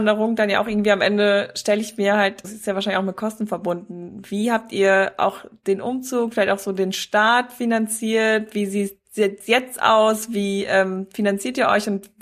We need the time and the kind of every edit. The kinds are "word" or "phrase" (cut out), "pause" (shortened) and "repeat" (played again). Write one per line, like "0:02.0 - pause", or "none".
0:02.4 - word

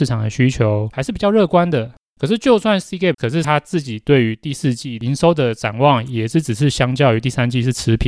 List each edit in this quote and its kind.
0:03.1 - phrase
0:03.4 - word

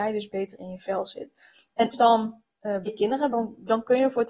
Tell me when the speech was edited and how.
0:01.9 - word
0:02.9 - word
0:03.3 - word

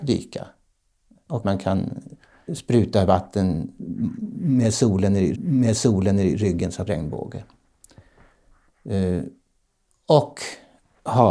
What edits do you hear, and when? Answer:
0:01.4 - word
0:02.5 - word
0:05.3 - repeat
0:06.9 - phrase

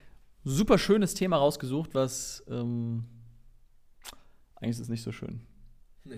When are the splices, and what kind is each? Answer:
none

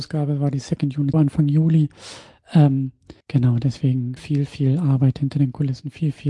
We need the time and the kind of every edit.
0:01.1 - phrase
0:03.2 - pause
0:04.2 - word

